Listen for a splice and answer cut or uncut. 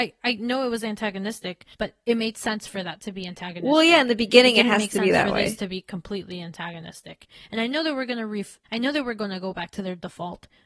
cut